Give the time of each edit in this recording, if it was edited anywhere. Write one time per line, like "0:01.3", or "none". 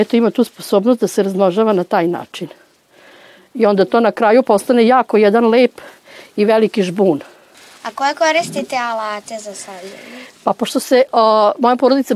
none